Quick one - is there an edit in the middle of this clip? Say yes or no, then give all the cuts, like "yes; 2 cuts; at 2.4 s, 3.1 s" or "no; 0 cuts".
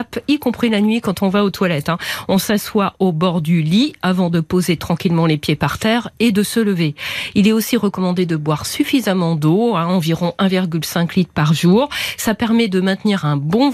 no; 0 cuts